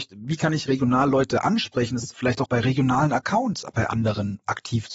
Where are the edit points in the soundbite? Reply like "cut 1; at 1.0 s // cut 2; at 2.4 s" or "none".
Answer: cut 1; at 2.1 s // cut 2; at 2.4 s